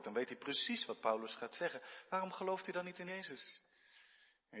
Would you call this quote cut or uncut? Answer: cut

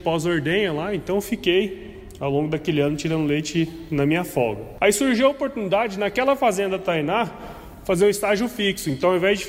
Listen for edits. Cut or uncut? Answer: uncut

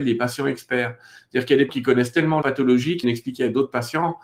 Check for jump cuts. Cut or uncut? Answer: cut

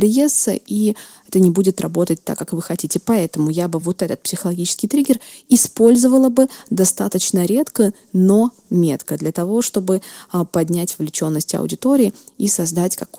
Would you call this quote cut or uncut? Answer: uncut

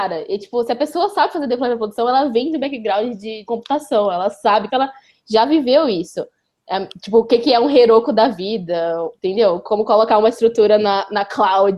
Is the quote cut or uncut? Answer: cut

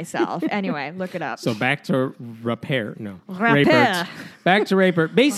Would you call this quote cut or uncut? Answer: uncut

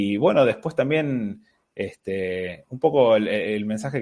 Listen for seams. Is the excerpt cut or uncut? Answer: uncut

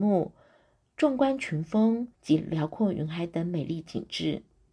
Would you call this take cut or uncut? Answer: cut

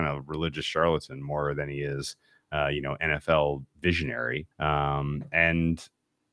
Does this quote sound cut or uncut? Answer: cut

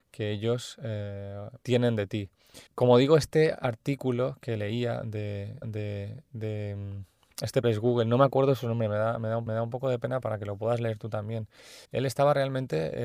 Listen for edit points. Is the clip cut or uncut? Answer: cut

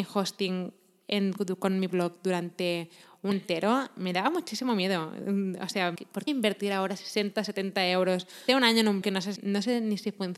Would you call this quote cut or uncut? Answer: cut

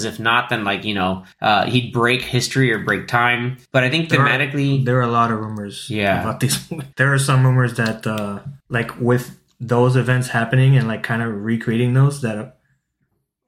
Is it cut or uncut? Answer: cut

